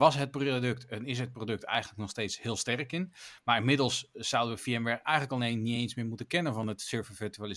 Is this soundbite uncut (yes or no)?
yes